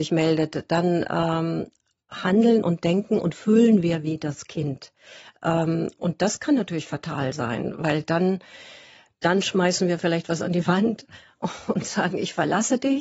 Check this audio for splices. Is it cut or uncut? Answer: uncut